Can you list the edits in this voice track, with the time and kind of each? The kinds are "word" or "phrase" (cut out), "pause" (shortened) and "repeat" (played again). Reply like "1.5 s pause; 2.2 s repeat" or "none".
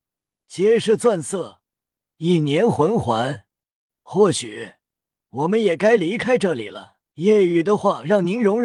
3.8 s pause; 7.1 s pause